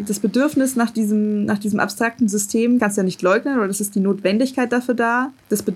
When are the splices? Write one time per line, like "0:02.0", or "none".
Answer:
none